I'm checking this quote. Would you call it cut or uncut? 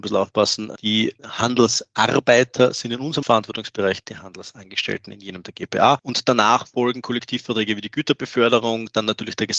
uncut